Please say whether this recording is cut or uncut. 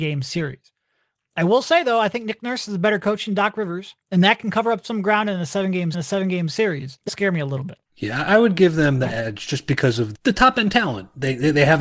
cut